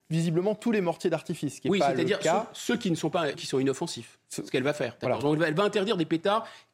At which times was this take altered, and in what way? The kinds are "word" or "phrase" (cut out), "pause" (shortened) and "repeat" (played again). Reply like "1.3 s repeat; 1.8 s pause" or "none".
3.3 s word